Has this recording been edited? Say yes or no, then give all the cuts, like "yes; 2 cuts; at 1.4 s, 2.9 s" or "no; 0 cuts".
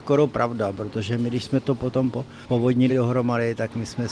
yes; 1 cut; at 2.9 s